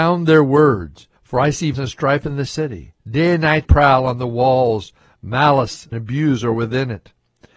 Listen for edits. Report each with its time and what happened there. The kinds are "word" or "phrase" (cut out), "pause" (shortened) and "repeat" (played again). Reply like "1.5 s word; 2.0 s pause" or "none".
1.2 s pause; 1.7 s word; 3.0 s pause; 3.6 s word; 5.9 s word